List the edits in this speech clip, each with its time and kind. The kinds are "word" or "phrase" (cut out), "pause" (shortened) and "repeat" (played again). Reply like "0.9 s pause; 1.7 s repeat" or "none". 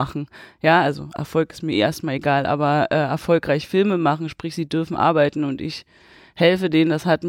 none